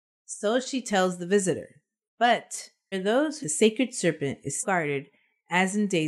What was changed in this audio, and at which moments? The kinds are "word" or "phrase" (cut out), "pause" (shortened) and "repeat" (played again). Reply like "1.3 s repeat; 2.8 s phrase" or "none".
2.9 s word; 3.4 s phrase; 4.6 s word